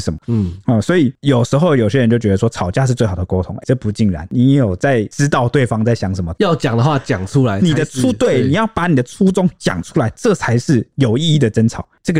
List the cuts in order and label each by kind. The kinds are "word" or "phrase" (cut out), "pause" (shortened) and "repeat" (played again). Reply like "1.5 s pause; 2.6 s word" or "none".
3.6 s word